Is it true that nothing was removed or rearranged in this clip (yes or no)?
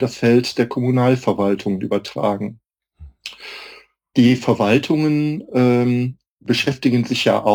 yes